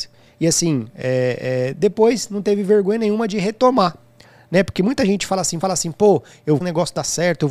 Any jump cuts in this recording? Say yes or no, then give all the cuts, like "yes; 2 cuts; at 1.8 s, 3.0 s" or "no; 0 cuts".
yes; 2 cuts; at 5.6 s, 6.6 s